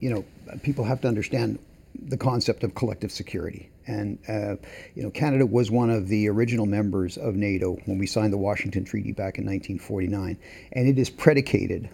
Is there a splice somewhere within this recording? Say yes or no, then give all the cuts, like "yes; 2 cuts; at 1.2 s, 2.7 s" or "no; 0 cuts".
no; 0 cuts